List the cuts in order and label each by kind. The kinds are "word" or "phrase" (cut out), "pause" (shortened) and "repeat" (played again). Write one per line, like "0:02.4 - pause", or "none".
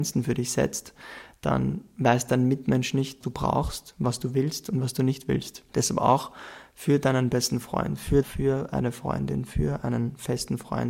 0:03.2 - word
0:05.7 - pause
0:08.2 - phrase